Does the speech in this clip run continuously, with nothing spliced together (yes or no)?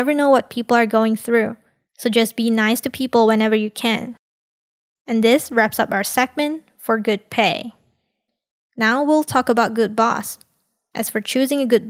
yes